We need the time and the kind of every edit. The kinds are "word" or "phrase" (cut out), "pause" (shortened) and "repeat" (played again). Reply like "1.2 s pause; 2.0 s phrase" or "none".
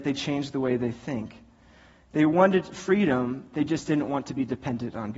none